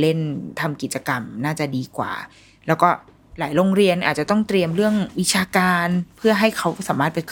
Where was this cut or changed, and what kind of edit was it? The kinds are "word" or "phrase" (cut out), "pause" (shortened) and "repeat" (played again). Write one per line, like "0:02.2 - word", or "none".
none